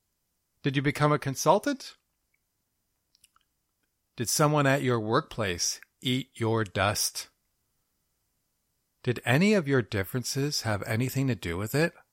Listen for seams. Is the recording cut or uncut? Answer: uncut